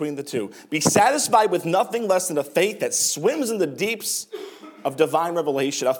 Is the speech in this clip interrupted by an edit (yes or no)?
no